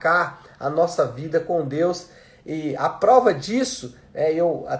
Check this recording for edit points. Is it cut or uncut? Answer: uncut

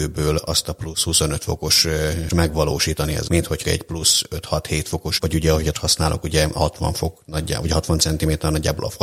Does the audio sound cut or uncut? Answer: cut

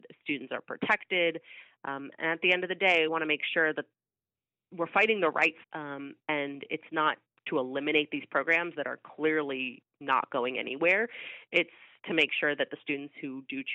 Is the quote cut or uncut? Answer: cut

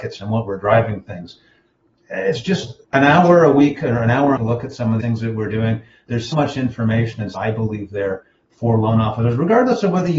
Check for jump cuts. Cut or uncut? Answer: cut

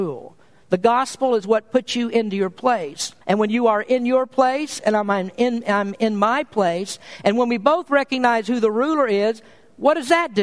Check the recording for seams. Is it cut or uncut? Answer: cut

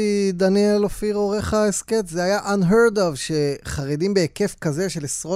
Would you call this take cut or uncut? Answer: uncut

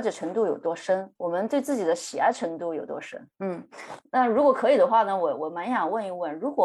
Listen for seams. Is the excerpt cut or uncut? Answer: cut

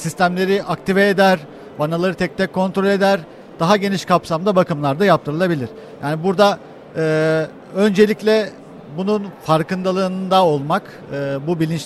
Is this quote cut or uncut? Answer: uncut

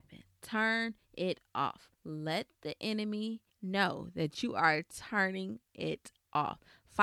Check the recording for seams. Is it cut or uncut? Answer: cut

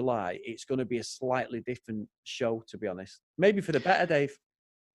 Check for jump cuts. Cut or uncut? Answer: cut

